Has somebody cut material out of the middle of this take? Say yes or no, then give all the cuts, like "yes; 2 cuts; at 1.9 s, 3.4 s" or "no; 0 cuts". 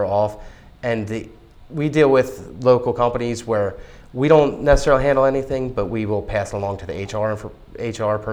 no; 0 cuts